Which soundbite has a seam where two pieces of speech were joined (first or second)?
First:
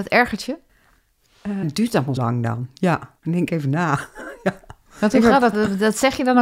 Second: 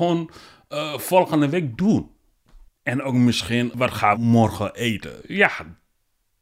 first